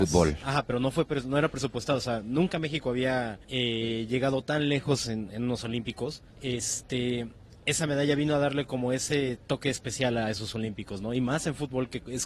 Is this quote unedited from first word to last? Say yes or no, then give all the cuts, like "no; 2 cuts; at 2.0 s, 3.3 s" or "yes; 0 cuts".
no; 2 cuts; at 3.4 s, 6.3 s